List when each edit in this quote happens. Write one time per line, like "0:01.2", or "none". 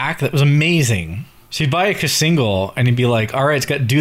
0:01.4